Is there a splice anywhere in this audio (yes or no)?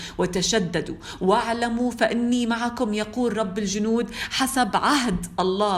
no